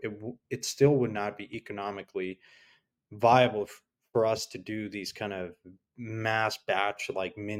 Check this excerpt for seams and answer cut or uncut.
uncut